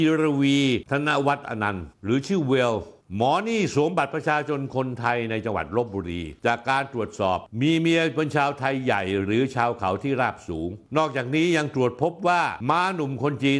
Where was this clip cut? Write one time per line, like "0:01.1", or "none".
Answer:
0:06.4